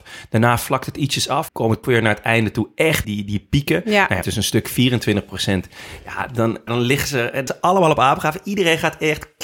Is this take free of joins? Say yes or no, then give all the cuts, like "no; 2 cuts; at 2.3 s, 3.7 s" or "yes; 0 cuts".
no; 6 cuts; at 1.5 s, 1.8 s, 3.0 s, 4.2 s, 6.7 s, 7.5 s